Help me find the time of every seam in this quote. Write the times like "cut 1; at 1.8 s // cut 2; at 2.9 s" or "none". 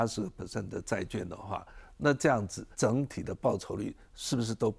cut 1; at 2.7 s